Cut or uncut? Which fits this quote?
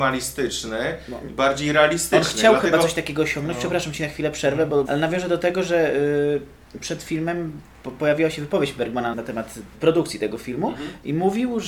cut